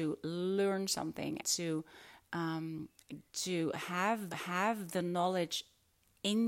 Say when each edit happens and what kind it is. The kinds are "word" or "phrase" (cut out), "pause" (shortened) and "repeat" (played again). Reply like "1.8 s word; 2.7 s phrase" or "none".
1.4 s word; 3.3 s pause; 4.3 s repeat